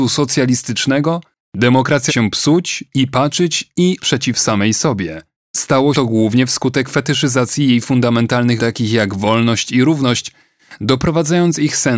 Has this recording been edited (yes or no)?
yes